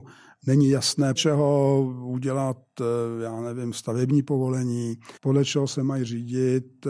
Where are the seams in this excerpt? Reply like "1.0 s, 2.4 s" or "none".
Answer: 1.2 s, 5.2 s